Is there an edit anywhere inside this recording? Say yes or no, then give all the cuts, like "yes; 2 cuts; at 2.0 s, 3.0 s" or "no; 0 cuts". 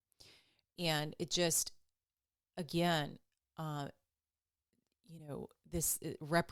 no; 0 cuts